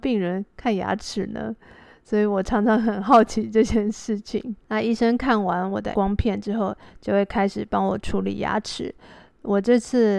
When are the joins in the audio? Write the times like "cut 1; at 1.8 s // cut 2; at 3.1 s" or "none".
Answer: cut 1; at 4.6 s // cut 2; at 5.9 s